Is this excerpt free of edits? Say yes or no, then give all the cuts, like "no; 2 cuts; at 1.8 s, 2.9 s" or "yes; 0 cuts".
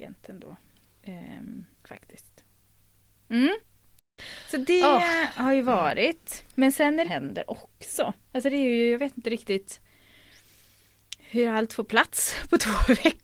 no; 3 cuts; at 1.7 s, 7.0 s, 8.2 s